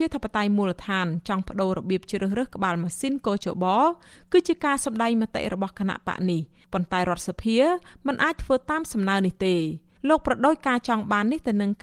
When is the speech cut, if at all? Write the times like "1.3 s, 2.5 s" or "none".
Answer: none